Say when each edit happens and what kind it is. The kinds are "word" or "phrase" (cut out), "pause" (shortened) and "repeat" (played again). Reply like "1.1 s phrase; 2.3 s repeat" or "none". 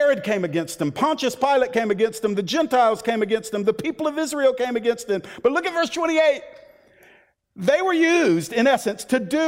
none